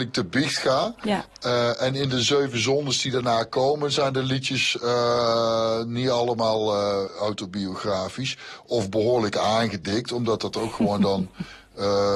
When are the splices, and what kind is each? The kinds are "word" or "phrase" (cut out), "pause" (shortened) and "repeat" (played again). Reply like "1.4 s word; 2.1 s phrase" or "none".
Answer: none